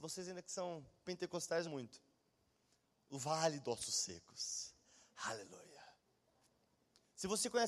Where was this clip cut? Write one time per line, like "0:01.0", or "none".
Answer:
0:01.6